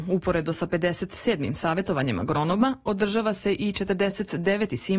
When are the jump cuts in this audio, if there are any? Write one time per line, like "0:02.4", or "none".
none